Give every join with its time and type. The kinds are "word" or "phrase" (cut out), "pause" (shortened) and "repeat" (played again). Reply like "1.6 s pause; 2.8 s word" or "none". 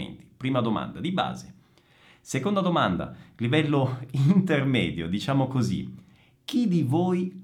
none